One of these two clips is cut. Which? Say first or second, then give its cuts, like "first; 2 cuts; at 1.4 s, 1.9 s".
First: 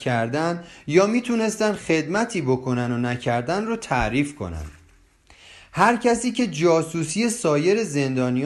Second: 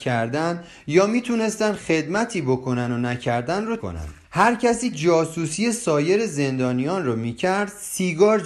second; 3 cuts; at 3.8 s, 4.2 s, 4.9 s